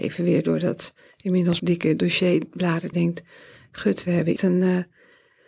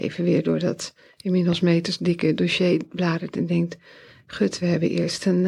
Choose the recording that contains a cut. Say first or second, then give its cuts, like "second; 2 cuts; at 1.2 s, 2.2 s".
first; 3 cuts; at 1.6 s, 2.9 s, 4.4 s